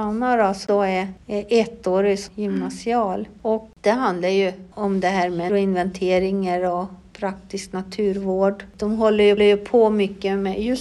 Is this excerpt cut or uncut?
cut